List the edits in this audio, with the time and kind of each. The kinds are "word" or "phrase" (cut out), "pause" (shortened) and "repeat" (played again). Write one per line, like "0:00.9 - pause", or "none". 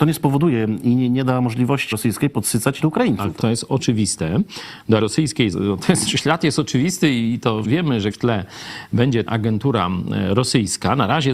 0:01.9 - word
0:02.8 - word
0:03.4 - word
0:05.0 - word
0:05.5 - word
0:06.1 - word
0:07.6 - word
0:08.1 - word
0:09.3 - word